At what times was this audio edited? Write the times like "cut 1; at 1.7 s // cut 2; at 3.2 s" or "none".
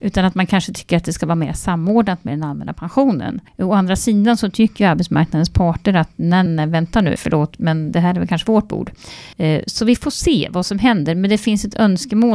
cut 1; at 3.5 s // cut 2; at 6.5 s // cut 3; at 7.2 s // cut 4; at 9.3 s

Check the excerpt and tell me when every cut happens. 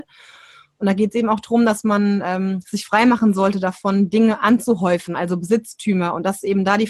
none

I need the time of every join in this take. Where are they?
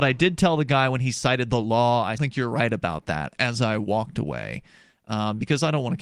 cut 1; at 2.2 s

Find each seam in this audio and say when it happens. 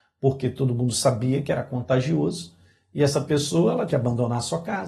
cut 1; at 3.9 s

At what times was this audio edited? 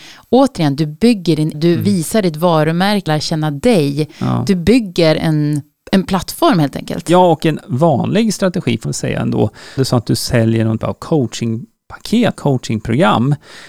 cut 1; at 1.5 s // cut 2; at 3.1 s // cut 3; at 5.2 s // cut 4; at 7.6 s // cut 5; at 8.8 s // cut 6; at 9.8 s // cut 7; at 10.8 s // cut 8; at 12.4 s

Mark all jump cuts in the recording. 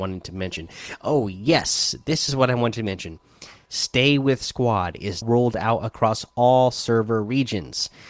cut 1; at 5.2 s

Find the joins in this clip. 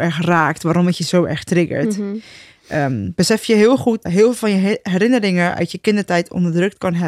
cut 1; at 4.1 s

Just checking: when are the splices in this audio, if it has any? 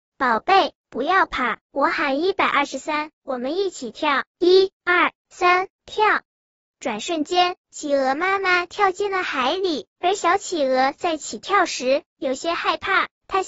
none

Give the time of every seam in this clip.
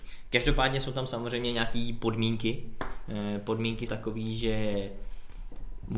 cut 1; at 3.9 s

